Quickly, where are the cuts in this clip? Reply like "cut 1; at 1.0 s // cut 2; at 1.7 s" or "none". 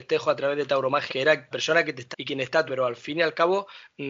cut 1; at 1.1 s // cut 2; at 1.5 s // cut 3; at 2.1 s // cut 4; at 2.7 s